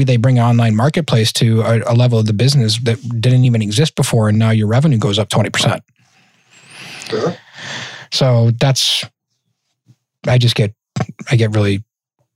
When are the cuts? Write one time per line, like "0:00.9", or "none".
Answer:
none